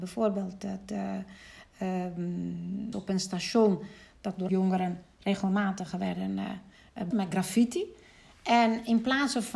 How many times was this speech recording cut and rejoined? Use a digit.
3